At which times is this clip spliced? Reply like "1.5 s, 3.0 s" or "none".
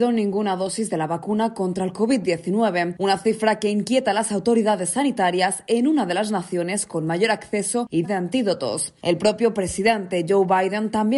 8.0 s